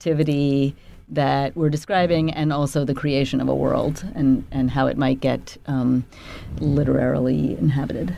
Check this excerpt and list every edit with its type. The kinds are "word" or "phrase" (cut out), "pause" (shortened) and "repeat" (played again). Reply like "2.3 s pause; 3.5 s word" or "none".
none